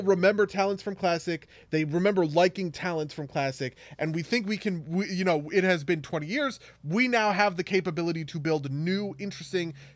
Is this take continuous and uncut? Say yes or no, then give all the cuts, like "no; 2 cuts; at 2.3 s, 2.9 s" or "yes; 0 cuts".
yes; 0 cuts